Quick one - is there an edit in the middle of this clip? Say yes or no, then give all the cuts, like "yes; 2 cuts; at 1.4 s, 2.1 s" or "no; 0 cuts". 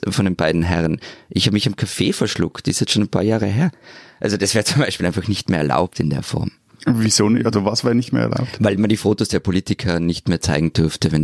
no; 0 cuts